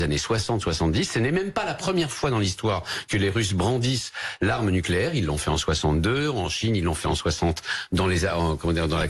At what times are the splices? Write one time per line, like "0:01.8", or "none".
none